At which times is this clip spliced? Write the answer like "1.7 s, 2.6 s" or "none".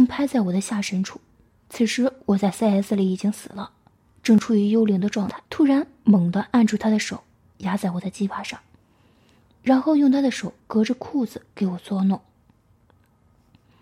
1.5 s, 5.5 s, 10.6 s, 11.5 s

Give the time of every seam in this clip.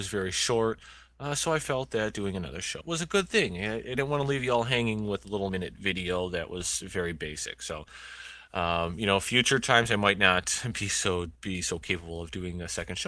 2.8 s, 5.5 s, 11.3 s

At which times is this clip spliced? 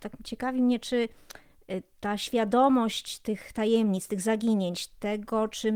none

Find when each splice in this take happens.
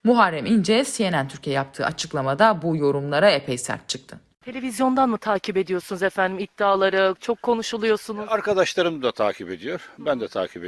none

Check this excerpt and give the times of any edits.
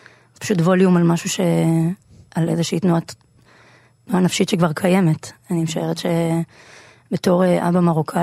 none

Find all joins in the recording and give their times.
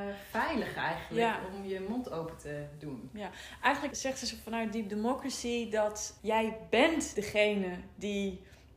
3.9 s, 6.2 s, 7.1 s

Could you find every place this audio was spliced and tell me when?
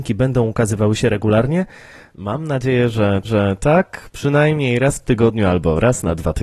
3.2 s

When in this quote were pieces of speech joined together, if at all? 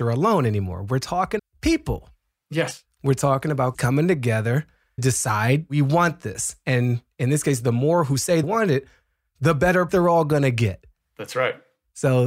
1.4 s, 3.7 s, 5.0 s, 8.4 s, 9.9 s

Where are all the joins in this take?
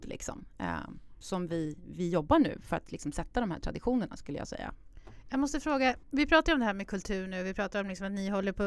6.0 s

